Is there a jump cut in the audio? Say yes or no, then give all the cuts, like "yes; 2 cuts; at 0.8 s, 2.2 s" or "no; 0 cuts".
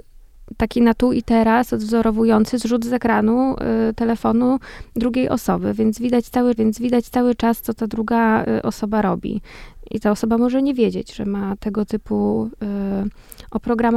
yes; 1 cut; at 6.6 s